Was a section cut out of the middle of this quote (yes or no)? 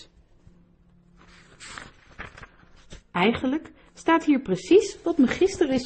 yes